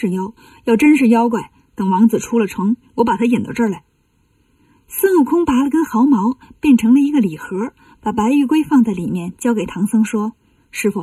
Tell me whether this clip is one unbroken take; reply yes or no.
yes